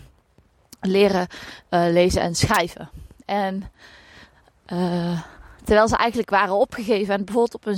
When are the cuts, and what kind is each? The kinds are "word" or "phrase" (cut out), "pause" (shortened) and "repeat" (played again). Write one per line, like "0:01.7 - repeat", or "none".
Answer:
none